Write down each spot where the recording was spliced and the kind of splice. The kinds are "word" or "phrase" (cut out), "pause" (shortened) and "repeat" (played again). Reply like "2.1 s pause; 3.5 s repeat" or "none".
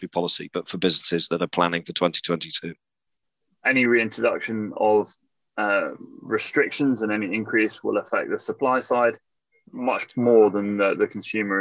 9.5 s word